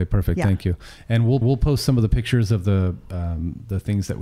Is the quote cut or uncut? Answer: cut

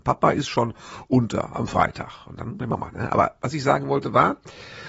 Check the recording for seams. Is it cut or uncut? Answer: cut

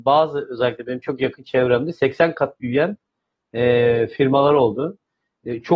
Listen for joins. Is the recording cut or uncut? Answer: uncut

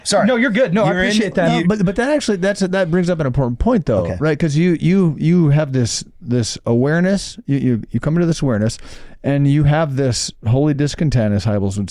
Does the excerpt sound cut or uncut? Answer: uncut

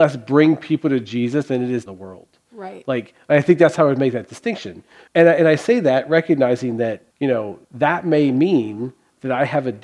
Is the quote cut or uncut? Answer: cut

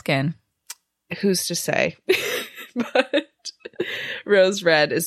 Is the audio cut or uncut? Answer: uncut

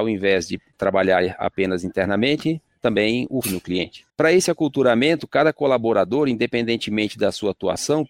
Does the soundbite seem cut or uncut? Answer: cut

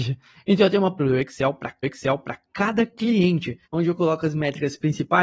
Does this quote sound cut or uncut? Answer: cut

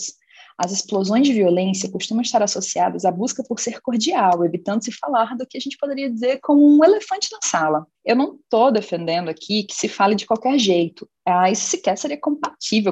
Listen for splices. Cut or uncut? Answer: cut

